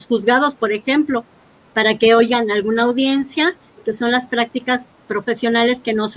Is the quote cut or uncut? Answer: uncut